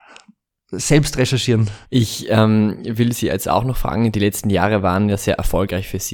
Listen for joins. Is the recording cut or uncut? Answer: cut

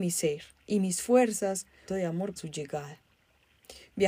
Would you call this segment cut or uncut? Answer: cut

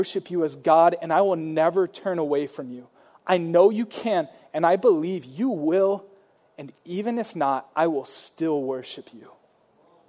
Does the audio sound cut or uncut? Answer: uncut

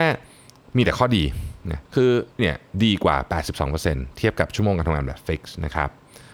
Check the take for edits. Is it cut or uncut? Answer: cut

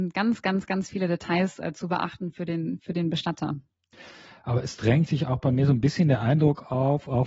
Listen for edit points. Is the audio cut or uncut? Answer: uncut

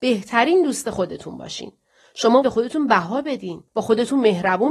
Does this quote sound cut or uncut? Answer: cut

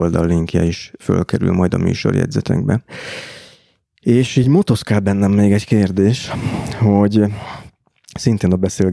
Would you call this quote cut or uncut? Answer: uncut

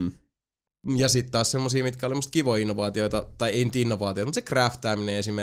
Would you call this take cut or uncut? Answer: uncut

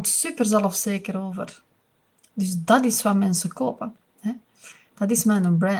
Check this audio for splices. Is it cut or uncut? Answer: uncut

